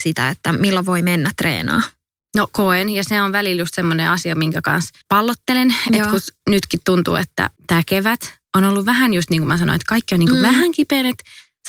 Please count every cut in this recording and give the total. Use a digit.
3